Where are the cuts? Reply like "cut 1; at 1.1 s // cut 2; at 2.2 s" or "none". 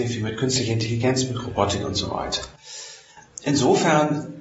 none